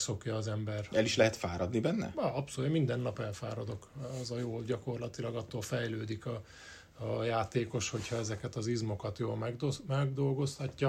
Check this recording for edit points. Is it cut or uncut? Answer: uncut